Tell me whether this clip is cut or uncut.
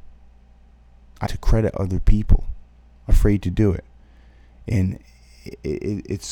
cut